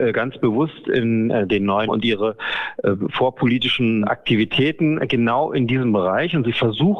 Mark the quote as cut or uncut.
cut